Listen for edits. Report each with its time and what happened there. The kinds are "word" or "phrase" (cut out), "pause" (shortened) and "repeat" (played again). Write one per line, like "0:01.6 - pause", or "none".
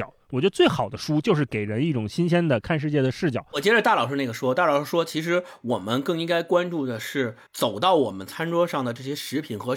0:07.5 - pause